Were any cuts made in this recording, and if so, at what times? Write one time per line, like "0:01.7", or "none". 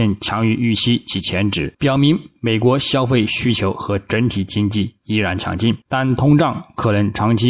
0:01.7
0:05.8